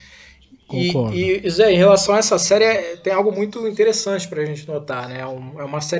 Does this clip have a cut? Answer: no; 0 cuts

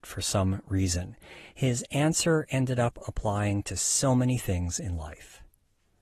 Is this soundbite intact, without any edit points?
yes; 0 cuts

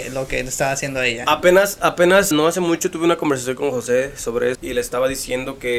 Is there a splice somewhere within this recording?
yes; 2 cuts; at 2.3 s, 4.5 s

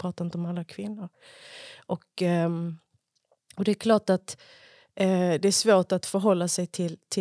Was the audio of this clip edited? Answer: no; 0 cuts

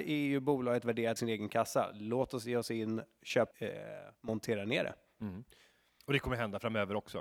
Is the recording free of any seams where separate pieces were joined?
no; 2 cuts; at 1.2 s, 3.5 s

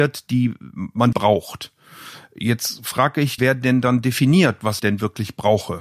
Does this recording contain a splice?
yes; 3 cuts; at 1.1 s, 3.4 s, 4.8 s

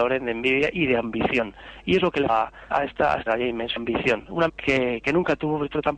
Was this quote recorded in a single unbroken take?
no; 5 cuts; at 2.3 s, 2.7 s, 3.3 s, 3.8 s, 4.5 s

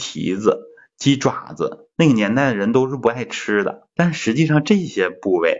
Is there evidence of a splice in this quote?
yes; 1 cut; at 3.9 s

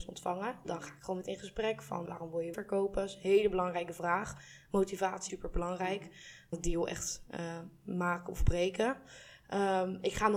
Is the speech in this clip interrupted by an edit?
yes; 5 cuts; at 1.2 s, 2.1 s, 2.5 s, 5.3 s, 6.5 s

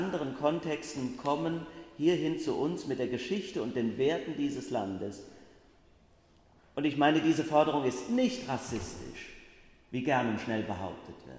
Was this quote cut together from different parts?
no; 0 cuts

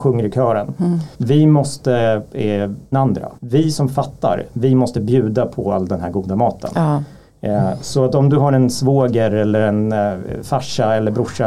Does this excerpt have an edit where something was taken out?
yes; 3 cuts; at 1.1 s, 2.9 s, 3.4 s

